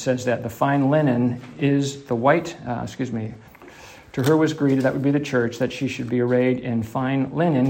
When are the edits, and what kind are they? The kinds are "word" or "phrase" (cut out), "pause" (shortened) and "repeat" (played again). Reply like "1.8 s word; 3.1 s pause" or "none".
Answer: none